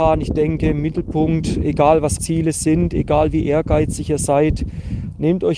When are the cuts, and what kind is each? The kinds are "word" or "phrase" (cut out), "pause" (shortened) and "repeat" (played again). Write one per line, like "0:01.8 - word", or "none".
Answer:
0:02.2 - word

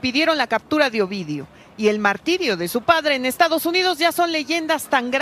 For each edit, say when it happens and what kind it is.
none

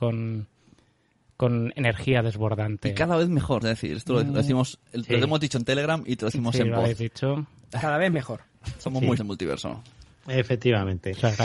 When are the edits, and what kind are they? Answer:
0:03.6 - word
0:08.1 - word
0:09.2 - word

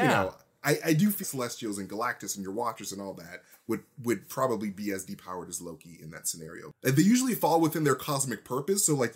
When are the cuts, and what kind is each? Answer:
0:01.2 - word

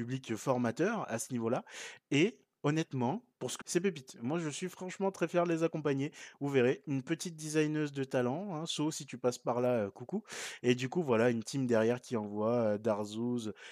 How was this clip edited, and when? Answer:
0:03.6 - phrase

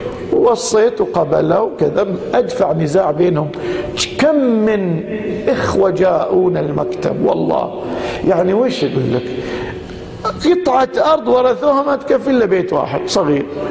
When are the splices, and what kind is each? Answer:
none

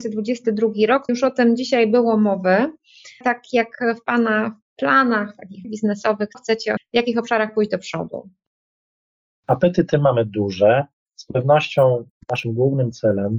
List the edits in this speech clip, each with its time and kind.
0:01.1 - word
0:03.2 - word
0:05.6 - word
0:06.3 - word
0:06.8 - word

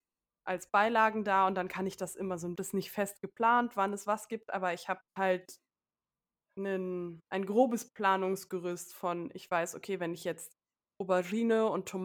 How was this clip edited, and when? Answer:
0:02.5 - phrase
0:05.1 - pause
0:07.2 - pause

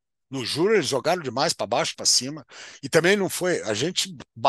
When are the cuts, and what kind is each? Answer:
0:01.9 - word

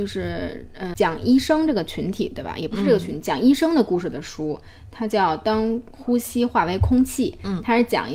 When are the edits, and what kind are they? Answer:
0:00.9 - word

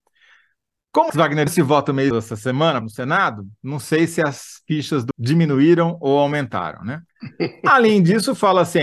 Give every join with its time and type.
0:01.1 - word
0:01.5 - word
0:02.1 - word
0:02.8 - phrase
0:05.1 - word
0:07.1 - pause

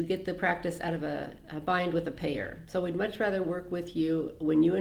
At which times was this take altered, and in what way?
none

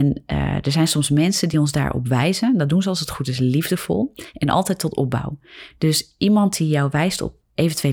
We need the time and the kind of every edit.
none

